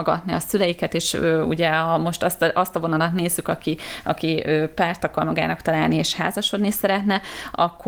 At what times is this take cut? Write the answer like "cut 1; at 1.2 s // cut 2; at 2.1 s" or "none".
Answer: none